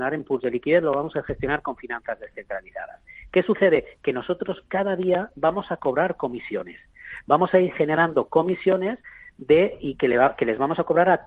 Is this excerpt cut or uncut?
uncut